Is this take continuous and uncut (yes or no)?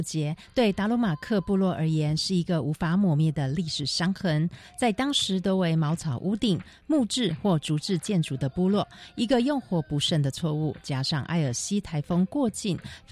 yes